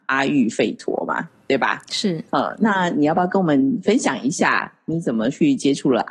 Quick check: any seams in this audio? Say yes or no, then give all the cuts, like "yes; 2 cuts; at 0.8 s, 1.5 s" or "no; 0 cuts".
no; 0 cuts